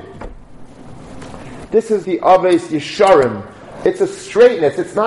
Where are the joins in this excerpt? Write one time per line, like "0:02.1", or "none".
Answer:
0:02.0